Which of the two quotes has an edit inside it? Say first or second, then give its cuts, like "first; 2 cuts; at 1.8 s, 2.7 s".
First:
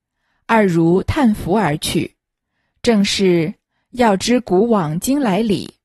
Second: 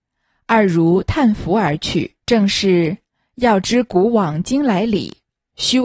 second; 1 cut; at 2.2 s